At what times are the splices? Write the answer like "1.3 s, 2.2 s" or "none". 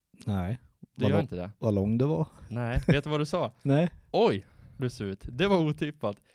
4.8 s

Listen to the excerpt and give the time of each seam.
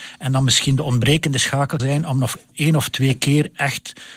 1.8 s

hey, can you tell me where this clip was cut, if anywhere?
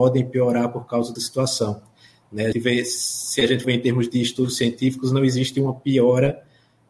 1.2 s, 2.5 s, 3.6 s

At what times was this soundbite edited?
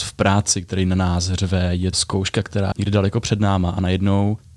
1.9 s, 2.7 s

